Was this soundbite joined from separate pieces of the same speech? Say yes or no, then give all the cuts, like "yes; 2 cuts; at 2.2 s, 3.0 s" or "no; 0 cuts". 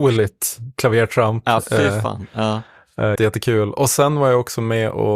yes; 1 cut; at 3.1 s